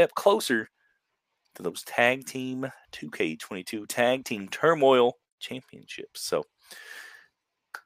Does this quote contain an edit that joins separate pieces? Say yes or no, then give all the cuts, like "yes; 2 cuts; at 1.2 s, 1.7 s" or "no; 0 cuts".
no; 0 cuts